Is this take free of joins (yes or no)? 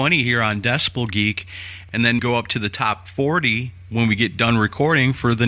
no